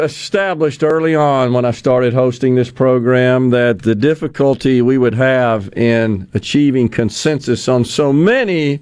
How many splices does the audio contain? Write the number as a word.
zero